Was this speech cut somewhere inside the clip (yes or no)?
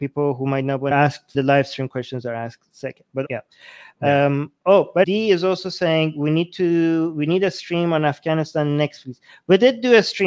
yes